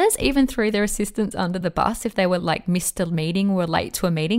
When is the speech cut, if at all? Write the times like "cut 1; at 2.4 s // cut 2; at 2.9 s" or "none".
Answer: none